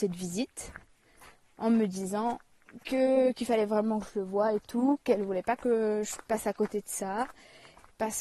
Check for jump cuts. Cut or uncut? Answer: cut